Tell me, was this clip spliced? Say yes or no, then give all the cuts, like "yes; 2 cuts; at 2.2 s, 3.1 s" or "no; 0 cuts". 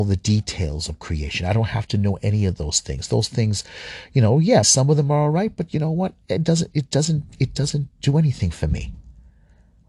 yes; 3 cuts; at 4.6 s, 6.7 s, 7.9 s